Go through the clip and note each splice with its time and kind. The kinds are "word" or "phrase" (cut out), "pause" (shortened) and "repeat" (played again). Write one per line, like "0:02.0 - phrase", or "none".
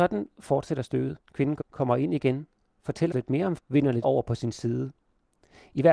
0:01.2 - pause
0:01.6 - word
0:03.1 - word
0:03.6 - word
0:04.0 - word